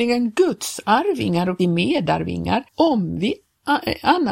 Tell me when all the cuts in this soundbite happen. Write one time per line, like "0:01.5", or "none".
0:01.6
0:02.7